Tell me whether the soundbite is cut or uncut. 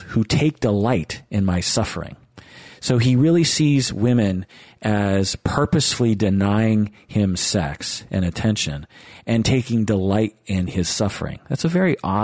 uncut